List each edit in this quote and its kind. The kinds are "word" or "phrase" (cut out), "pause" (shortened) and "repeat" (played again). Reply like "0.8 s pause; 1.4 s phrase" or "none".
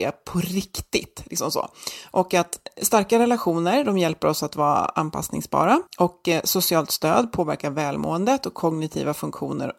5.9 s pause